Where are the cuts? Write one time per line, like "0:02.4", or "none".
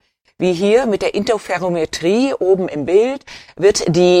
none